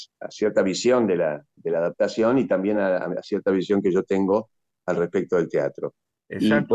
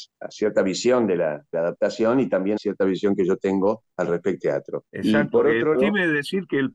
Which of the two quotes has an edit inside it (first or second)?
second